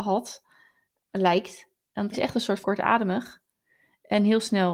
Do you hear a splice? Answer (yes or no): yes